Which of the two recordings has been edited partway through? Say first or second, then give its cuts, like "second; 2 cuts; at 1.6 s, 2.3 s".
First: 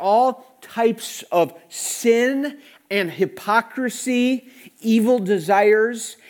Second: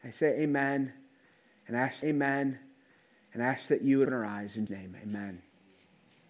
second; 3 cuts; at 2.0 s, 4.1 s, 4.7 s